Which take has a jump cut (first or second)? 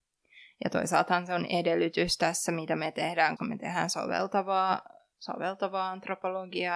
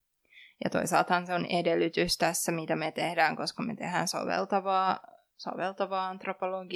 first